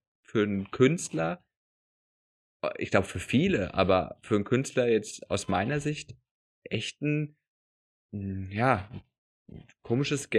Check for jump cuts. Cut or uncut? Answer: uncut